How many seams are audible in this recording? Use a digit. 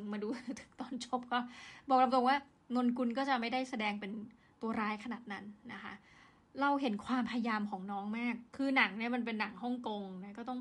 1